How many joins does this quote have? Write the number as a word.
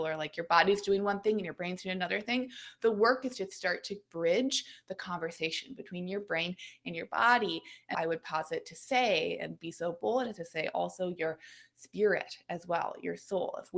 one